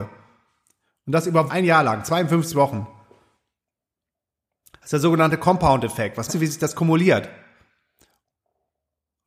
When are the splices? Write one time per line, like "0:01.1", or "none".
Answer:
0:01.5
0:06.3